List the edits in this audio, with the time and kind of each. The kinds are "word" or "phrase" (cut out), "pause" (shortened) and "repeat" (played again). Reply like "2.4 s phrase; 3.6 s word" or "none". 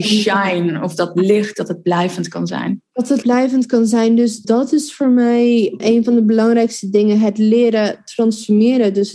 3.2 s word; 4.4 s word; 5.8 s word